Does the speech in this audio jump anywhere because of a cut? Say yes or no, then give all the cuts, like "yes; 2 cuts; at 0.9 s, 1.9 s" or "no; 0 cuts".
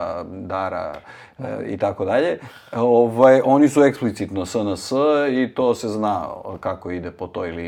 no; 0 cuts